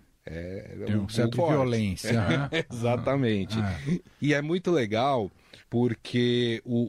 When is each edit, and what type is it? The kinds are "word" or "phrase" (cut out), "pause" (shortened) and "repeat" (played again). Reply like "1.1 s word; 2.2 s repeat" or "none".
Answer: 1.3 s phrase; 5.6 s pause